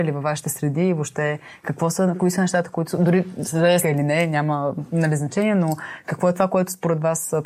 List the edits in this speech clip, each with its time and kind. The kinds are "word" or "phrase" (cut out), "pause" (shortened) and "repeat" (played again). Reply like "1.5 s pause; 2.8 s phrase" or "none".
3.8 s phrase